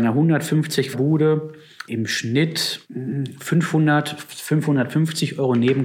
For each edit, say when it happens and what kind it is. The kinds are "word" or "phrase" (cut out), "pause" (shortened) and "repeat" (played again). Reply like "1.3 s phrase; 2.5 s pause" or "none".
0.9 s word; 1.9 s word; 2.8 s pause